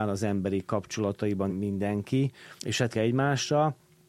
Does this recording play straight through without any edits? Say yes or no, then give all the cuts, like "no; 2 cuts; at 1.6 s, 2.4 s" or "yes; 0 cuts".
no; 3 cuts; at 1.5 s, 2.6 s, 2.9 s